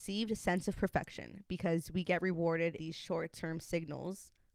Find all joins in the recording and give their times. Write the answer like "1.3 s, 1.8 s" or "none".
2.8 s